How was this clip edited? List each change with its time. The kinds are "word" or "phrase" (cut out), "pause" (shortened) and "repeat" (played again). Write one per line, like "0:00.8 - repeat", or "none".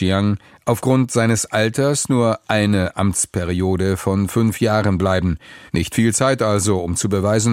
0:05.7 - pause